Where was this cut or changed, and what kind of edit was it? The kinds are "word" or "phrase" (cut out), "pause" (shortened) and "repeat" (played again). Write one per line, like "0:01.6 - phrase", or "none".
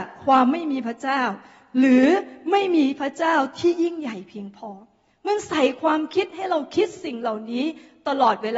none